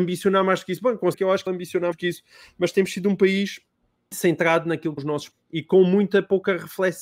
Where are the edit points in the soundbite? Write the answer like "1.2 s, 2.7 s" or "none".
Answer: 1.1 s, 1.5 s, 1.9 s, 4.1 s, 5.0 s, 5.3 s